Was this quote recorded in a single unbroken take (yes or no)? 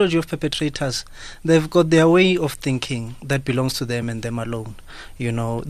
yes